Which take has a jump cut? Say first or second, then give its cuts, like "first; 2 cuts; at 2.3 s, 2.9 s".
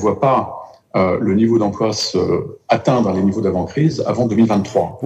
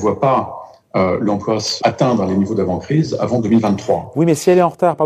second; 2 cuts; at 1.3 s, 1.8 s